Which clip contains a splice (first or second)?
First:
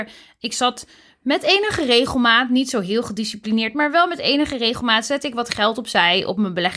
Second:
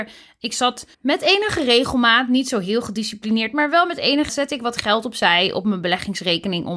second